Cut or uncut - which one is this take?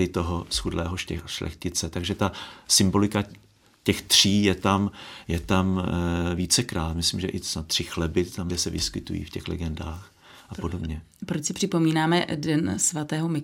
cut